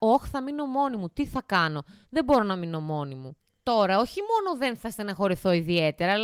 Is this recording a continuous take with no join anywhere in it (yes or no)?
yes